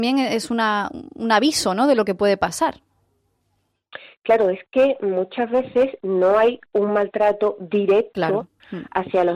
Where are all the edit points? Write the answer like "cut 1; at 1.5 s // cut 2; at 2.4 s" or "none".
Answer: none